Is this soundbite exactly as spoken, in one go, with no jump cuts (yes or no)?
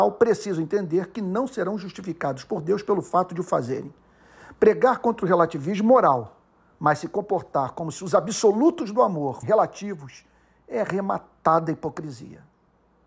no